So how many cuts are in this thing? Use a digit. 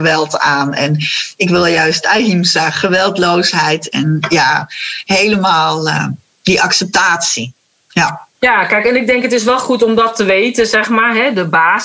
0